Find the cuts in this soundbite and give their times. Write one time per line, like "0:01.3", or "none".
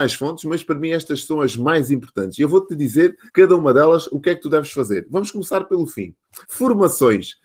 0:03.3
0:06.4